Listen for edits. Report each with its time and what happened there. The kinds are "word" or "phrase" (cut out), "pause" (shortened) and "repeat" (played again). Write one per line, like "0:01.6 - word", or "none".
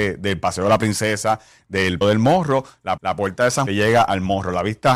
0:02.0 - word
0:03.0 - repeat
0:03.7 - phrase